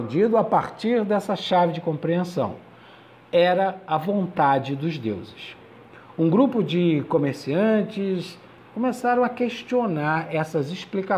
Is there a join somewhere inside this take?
no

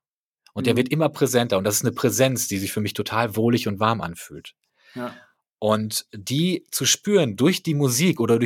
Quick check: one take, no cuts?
yes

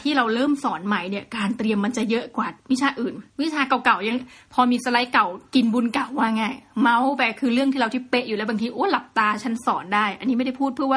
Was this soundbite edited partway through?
yes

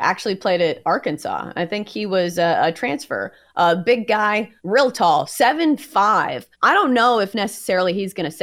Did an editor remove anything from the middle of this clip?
yes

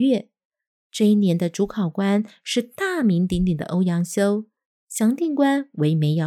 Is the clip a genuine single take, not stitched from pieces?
yes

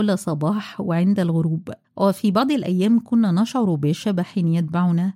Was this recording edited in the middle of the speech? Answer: yes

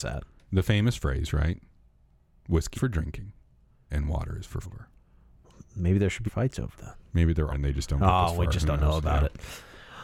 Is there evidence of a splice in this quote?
yes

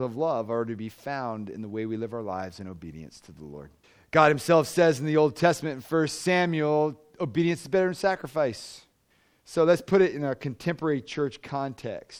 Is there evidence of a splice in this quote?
yes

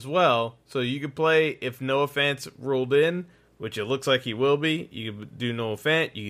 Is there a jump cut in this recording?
no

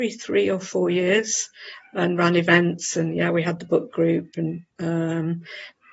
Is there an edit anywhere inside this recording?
yes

